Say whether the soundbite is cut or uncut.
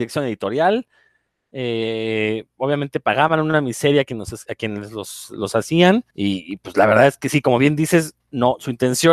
cut